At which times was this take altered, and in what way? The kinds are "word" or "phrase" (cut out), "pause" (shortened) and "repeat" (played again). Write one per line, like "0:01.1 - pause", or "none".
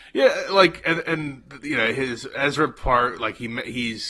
none